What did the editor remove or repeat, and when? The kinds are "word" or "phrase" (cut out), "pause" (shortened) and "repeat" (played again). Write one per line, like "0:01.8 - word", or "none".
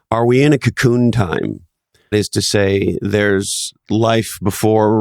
0:02.1 - word